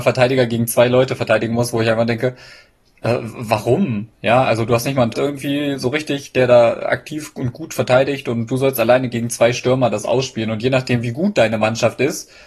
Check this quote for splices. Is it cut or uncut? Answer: cut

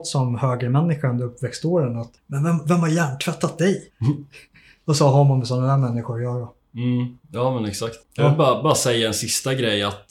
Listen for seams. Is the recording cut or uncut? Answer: cut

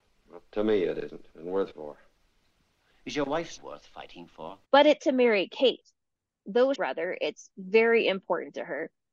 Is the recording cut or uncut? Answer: cut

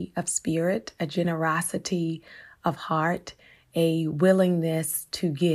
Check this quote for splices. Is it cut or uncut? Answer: uncut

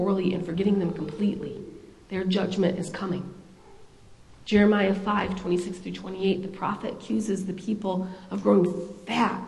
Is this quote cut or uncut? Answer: uncut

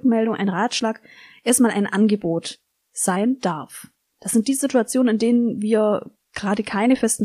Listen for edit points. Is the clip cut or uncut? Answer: uncut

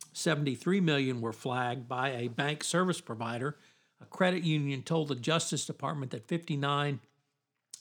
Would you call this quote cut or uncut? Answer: uncut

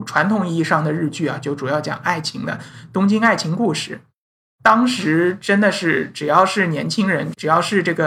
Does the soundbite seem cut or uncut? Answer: uncut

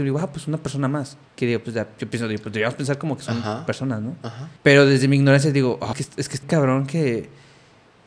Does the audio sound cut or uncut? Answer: cut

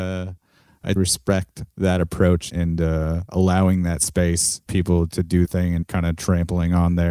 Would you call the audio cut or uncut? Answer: cut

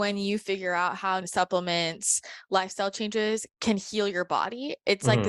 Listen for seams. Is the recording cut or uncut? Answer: cut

